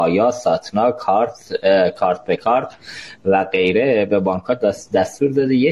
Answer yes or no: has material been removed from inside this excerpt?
no